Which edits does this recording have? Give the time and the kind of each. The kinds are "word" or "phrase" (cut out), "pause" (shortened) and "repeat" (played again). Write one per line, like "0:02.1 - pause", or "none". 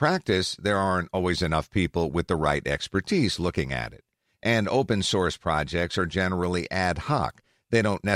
none